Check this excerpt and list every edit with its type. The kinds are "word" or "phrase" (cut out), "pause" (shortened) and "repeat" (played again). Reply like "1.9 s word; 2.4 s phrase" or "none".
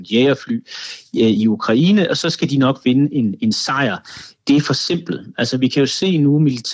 none